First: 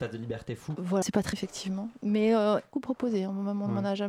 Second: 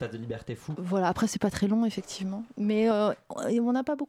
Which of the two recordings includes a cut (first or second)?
first